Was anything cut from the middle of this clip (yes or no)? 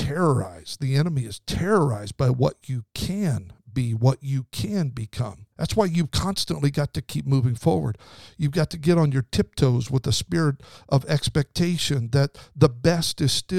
yes